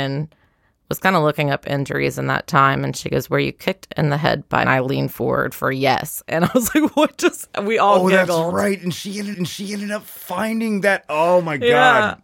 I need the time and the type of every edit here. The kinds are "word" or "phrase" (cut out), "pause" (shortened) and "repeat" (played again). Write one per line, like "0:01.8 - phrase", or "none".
0:04.6 - phrase
0:09.3 - repeat